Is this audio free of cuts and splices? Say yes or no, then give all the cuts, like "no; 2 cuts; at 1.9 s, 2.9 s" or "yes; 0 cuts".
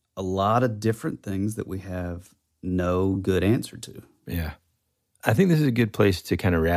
yes; 0 cuts